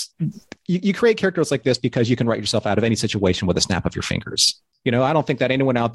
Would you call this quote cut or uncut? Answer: uncut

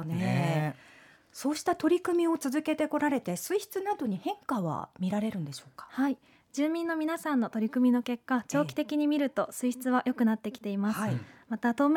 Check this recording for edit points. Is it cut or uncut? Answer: uncut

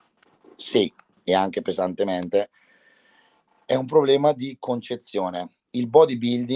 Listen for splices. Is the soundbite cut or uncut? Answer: uncut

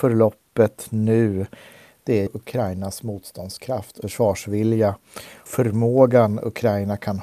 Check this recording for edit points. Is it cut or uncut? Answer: cut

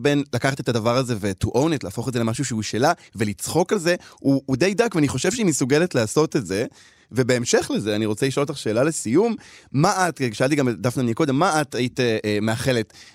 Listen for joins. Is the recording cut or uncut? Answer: uncut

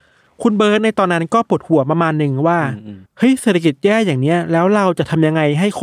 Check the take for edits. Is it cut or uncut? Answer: cut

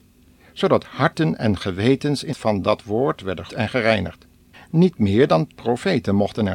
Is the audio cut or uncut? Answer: cut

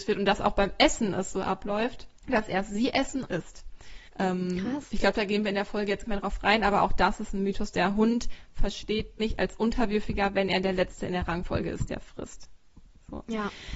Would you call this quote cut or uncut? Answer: cut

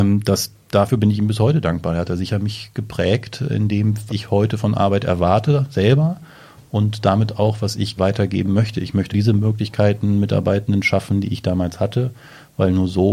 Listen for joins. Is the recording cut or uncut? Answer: cut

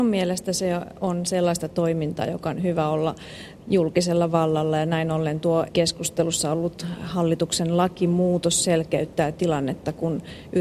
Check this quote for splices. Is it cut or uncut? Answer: cut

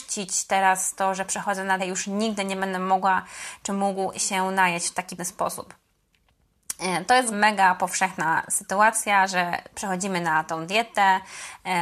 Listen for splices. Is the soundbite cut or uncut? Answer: cut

